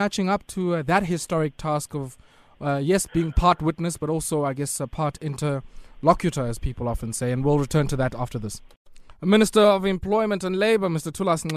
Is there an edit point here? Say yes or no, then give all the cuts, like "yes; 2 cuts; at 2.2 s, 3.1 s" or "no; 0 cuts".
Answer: no; 0 cuts